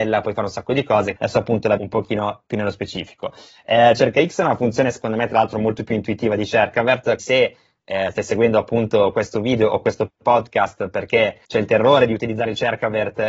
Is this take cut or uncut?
cut